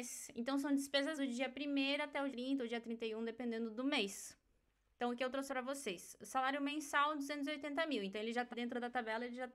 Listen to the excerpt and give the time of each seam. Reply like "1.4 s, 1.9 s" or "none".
1.2 s, 2.3 s, 5.5 s, 8.5 s